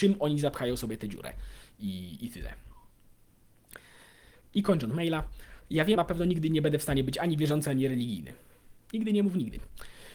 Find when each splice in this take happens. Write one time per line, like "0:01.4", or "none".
0:06.0